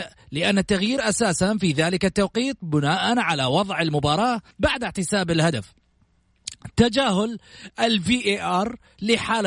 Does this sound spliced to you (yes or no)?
yes